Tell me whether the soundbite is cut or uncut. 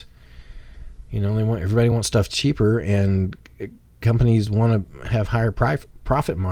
uncut